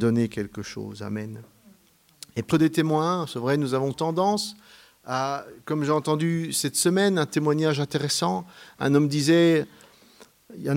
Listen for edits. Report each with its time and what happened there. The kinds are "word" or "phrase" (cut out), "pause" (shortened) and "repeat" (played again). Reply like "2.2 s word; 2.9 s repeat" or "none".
2.5 s word; 3.9 s word